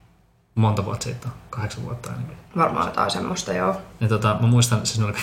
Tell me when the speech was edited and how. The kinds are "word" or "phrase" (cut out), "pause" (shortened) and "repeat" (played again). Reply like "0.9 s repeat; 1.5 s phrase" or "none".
2.5 s pause